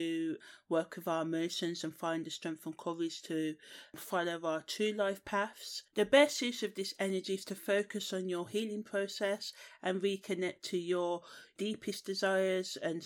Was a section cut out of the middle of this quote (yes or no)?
yes